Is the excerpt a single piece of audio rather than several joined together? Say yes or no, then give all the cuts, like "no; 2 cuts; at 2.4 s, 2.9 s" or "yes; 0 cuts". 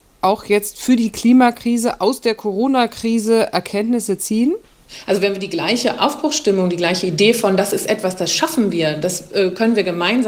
yes; 0 cuts